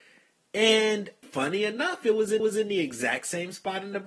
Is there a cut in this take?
yes; 2 cuts; at 1.2 s, 2.4 s

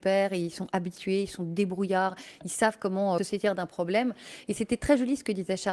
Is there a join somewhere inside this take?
yes; 1 cut; at 3.2 s

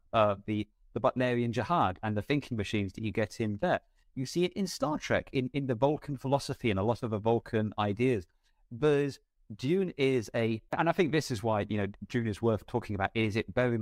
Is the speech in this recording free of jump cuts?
yes; 0 cuts

